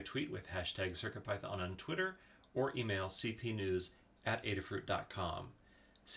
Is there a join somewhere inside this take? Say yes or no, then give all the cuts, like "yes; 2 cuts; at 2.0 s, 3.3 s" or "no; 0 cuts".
no; 0 cuts